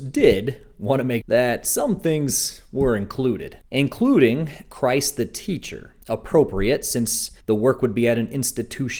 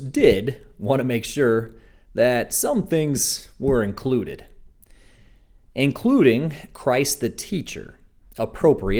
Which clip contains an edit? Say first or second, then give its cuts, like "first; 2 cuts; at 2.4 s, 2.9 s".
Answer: first; 4 cuts; at 1.2 s, 3.6 s, 6.0 s, 7.4 s